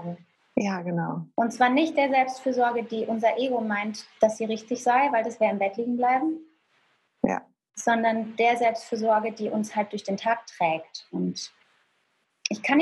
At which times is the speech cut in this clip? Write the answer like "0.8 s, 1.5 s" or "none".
none